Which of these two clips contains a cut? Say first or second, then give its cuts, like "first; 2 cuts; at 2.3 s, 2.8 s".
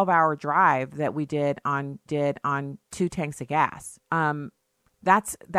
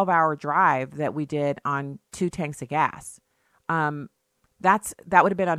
first; 2 cuts; at 2.1 s, 4.0 s